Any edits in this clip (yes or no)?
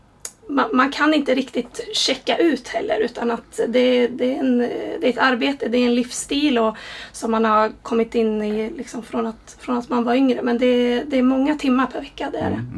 no